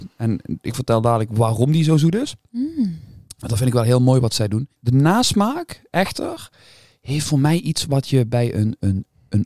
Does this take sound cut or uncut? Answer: uncut